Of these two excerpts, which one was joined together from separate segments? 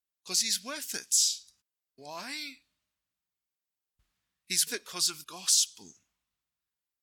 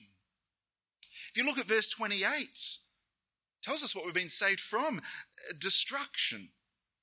first; 3 cuts; at 1.6 s, 4.7 s, 5.2 s

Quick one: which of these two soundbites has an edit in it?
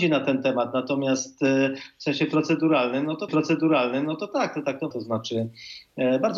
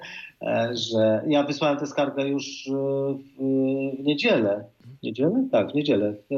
first; 2 cuts; at 3.3 s, 4.9 s

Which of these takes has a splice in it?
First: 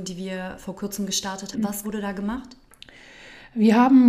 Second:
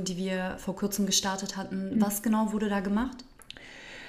first; 2 cuts; at 1.5 s, 1.8 s

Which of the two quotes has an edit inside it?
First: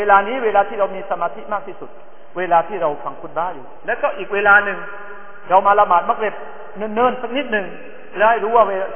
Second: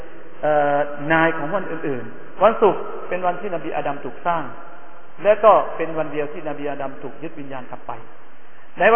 second; 1 cut; at 2.4 s

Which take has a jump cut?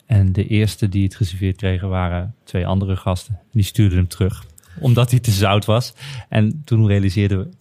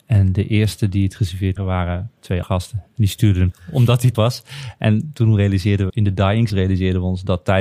second; 6 cuts; at 1.6 s, 2.4 s, 3.5 s, 4.1 s, 5.9 s, 6.5 s

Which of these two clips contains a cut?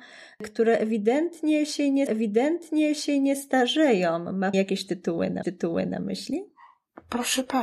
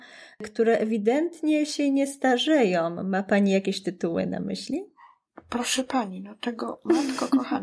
first; 3 cuts; at 2.1 s, 4.5 s, 5.4 s

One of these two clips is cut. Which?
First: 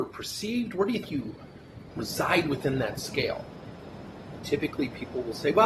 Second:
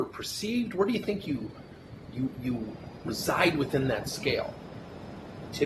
first; 2 cuts; at 1.1 s, 1.9 s

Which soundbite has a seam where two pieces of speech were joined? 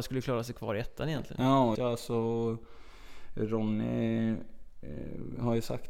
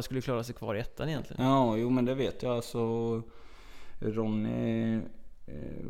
first; 1 cut; at 1.7 s

